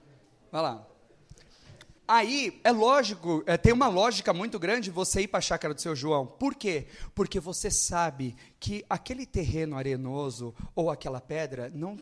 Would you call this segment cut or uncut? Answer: cut